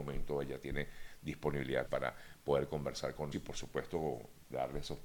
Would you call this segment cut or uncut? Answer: cut